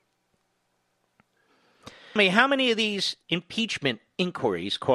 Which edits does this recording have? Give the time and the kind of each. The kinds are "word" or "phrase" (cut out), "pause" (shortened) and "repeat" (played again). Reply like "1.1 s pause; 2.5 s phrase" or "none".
2.2 s word; 3.2 s pause